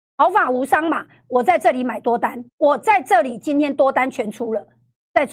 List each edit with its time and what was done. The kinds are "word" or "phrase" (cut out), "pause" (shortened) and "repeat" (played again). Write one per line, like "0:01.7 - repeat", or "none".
0:02.5 - pause

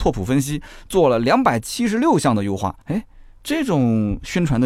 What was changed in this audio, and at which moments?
0:02.8 - pause

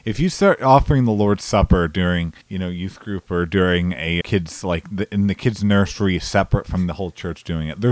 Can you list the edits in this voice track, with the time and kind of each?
0:02.4 - pause
0:04.2 - word

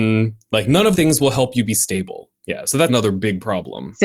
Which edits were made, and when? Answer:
0:00.9 - word
0:02.4 - pause
0:02.9 - word

